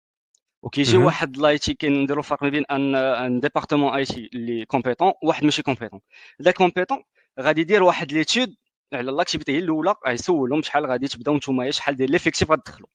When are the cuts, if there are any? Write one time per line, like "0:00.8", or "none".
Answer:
0:06.5